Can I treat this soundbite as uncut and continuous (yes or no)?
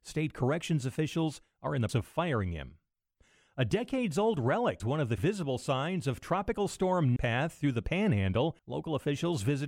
no